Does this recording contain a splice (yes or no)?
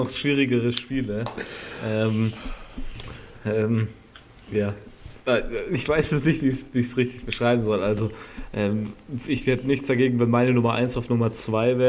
no